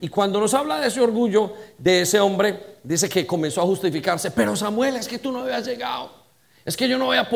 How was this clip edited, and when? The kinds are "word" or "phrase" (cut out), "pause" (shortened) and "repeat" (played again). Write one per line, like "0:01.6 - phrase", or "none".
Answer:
none